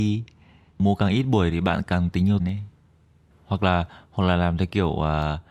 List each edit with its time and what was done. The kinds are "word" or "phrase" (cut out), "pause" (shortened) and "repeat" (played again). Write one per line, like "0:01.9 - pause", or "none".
0:02.4 - word